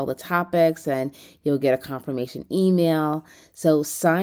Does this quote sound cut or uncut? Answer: uncut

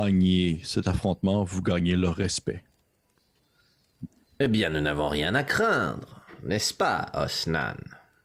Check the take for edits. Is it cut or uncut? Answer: uncut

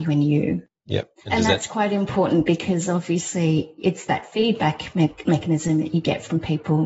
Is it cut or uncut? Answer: uncut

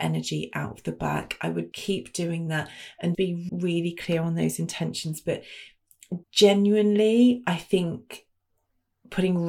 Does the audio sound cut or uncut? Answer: cut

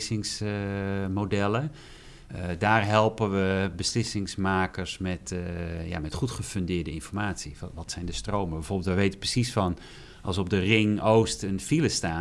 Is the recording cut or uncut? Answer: uncut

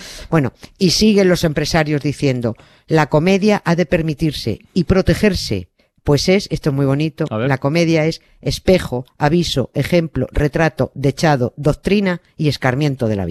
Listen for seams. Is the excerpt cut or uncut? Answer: uncut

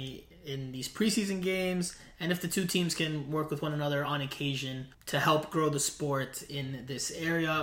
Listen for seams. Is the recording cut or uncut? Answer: cut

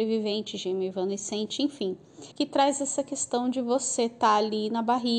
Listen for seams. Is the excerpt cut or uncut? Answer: cut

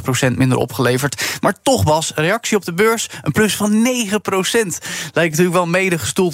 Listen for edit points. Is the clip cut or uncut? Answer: uncut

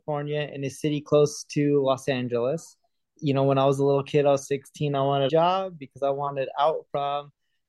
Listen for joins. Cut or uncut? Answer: cut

